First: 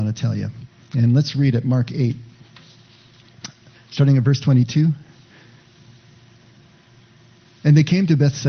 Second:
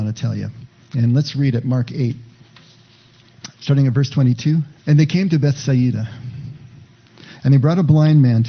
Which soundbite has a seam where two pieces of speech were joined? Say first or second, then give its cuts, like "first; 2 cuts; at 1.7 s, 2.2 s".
second; 2 cuts; at 3.5 s, 4.8 s